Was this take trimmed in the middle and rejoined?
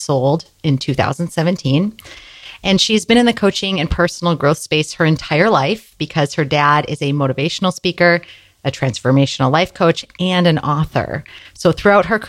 no; 0 cuts

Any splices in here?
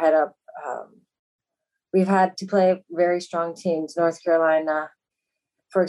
no; 0 cuts

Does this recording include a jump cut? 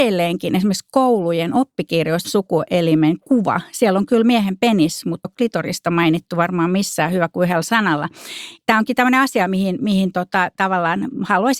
yes; 2 cuts; at 2.2 s, 5.2 s

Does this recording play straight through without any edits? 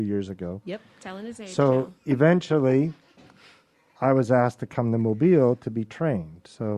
yes; 0 cuts

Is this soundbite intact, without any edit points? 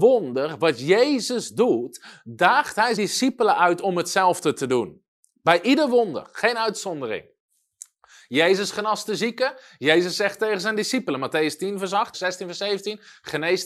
no; 2 cuts; at 3.0 s, 12.1 s

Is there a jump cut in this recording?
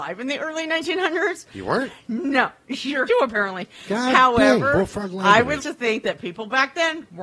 yes; 2 cuts; at 3.1 s, 5.6 s

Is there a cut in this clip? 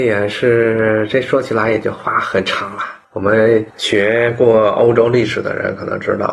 yes; 1 cut; at 3.0 s

